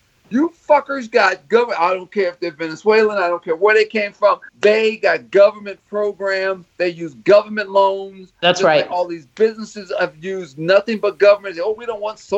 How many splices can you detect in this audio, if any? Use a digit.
2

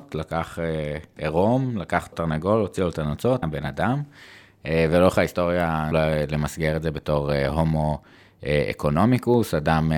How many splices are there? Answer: 3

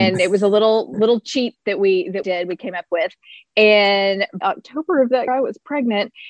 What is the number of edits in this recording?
3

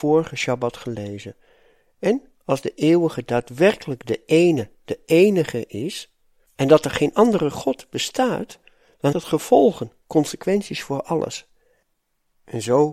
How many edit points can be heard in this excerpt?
1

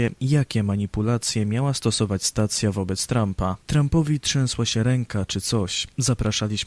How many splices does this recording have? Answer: 1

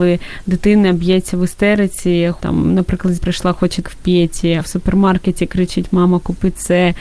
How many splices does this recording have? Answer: 4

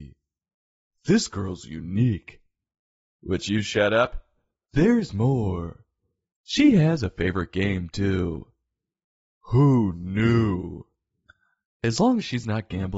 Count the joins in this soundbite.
0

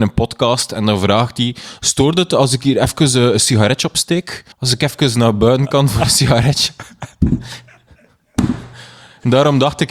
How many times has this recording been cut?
1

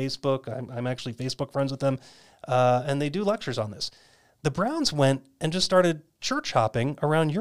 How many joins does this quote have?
0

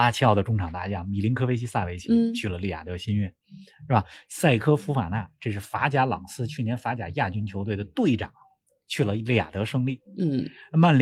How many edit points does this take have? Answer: 0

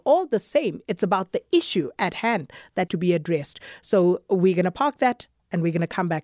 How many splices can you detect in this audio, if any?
1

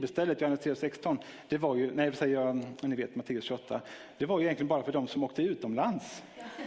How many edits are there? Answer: 0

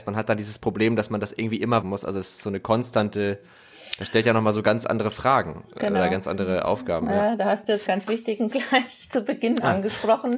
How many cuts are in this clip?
3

